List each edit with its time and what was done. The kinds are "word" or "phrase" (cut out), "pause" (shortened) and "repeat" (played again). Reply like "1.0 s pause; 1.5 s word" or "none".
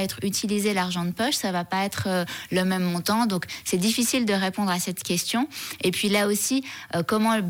none